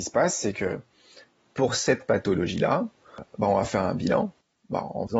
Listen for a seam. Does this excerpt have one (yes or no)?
no